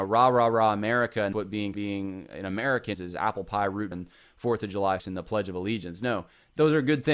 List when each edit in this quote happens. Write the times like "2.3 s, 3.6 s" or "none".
1.3 s, 1.7 s, 2.9 s, 3.9 s, 5.0 s

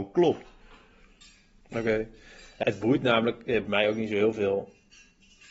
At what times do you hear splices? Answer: 2.6 s, 3.7 s

